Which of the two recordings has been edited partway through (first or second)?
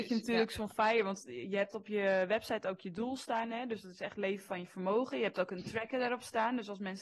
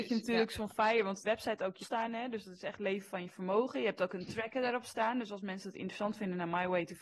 second